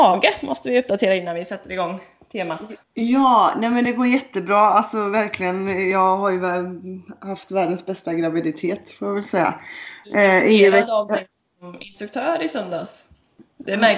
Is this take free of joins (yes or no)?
no